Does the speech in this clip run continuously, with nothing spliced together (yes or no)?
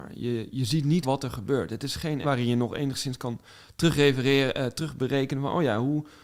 no